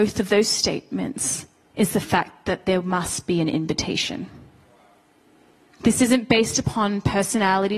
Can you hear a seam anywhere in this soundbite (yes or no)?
no